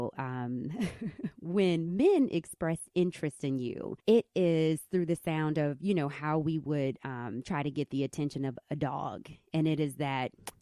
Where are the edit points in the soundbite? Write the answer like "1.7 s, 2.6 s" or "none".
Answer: 4.0 s